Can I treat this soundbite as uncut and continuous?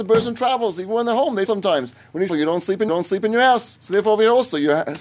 no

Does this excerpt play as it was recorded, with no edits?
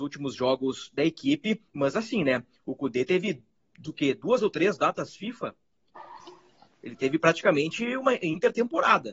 no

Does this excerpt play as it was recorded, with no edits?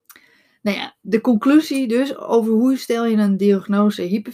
yes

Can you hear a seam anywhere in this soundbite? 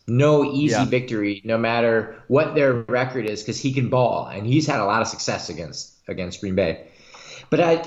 no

